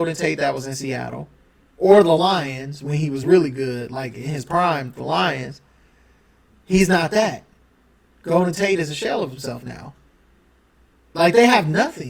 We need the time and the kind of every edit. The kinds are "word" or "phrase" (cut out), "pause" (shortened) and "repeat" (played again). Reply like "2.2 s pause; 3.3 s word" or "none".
none